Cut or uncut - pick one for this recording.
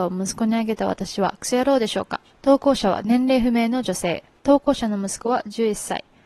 cut